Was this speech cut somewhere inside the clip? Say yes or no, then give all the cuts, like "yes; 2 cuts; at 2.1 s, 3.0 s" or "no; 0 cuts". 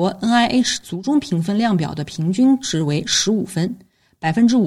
no; 0 cuts